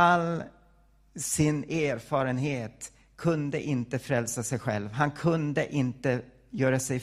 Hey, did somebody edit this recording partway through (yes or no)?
no